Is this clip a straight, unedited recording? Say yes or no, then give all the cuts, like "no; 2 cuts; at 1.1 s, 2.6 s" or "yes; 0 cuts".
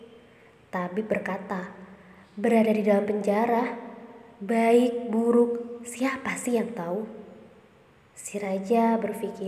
yes; 0 cuts